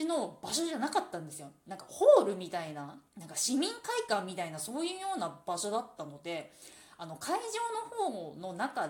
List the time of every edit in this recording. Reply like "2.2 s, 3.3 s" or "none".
3.1 s